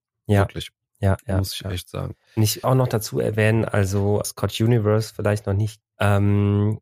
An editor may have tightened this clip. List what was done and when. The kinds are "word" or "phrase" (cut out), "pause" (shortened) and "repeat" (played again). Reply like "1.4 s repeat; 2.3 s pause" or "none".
2.2 s pause; 2.6 s word; 4.2 s word; 5.8 s word